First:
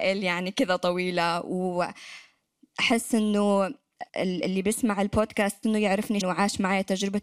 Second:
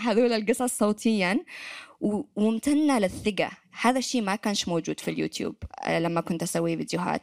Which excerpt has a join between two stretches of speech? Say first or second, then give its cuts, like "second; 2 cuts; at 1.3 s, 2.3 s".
first; 3 cuts; at 4.1 s, 5.6 s, 6.2 s